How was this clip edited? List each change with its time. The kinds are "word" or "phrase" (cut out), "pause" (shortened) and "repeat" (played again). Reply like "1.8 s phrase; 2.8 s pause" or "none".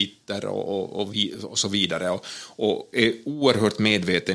none

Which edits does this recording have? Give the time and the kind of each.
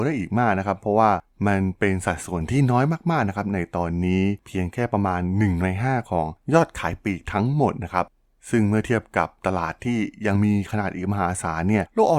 none

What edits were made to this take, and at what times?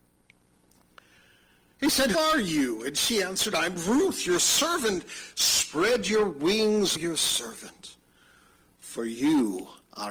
2.1 s word; 7.0 s word

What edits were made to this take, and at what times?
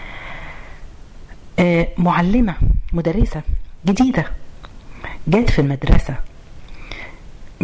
none

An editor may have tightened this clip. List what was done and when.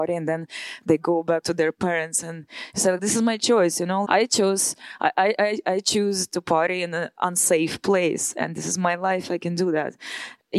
1.4 s word; 3.0 s word; 4.0 s word

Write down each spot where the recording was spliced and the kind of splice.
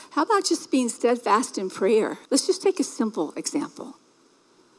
2.3 s pause

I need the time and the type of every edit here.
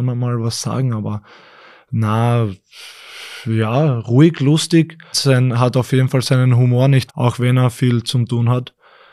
5.1 s word; 7.1 s word

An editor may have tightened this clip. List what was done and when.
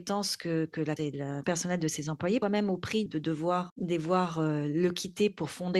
1.0 s word; 1.4 s word; 2.4 s word; 3.1 s word; 3.7 s word

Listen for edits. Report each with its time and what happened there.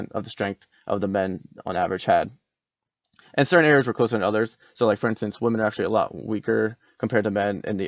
none

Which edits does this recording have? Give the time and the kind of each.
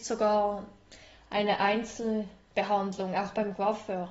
none

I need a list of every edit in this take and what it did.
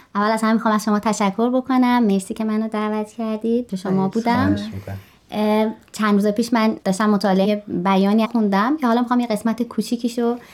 3.7 s phrase; 6.8 s pause; 7.4 s word; 8.2 s phrase

